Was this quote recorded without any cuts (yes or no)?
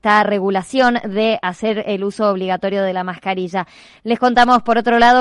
yes